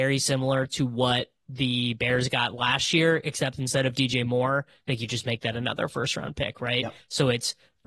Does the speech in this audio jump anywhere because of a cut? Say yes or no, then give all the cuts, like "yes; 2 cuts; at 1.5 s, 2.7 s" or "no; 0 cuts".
no; 0 cuts